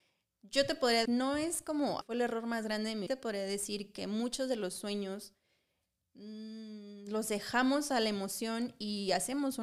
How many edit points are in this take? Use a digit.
3